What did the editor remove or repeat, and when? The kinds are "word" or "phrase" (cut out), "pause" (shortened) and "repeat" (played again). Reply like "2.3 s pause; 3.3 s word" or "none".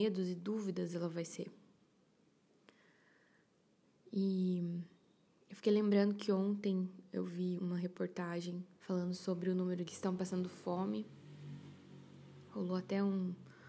7.6 s word; 8.7 s pause; 9.9 s phrase